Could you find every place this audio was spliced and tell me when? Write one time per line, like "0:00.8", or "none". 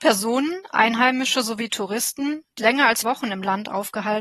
0:02.6
0:03.0